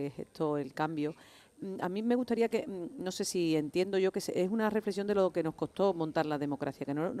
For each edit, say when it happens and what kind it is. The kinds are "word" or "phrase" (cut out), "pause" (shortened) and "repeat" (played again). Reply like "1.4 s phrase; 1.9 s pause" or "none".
none